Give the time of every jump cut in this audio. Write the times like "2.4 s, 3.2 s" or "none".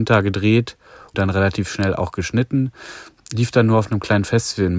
1.1 s